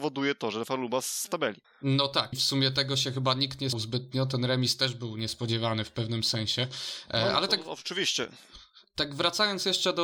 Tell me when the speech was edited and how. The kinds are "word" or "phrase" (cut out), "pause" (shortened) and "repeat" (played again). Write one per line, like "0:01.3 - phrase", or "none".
0:01.2 - phrase
0:01.6 - pause
0:02.3 - word
0:03.7 - word